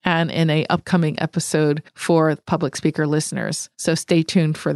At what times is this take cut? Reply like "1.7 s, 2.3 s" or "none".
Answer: 1.9 s, 3.7 s